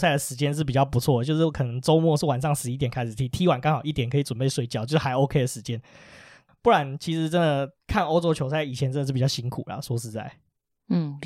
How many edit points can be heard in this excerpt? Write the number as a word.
zero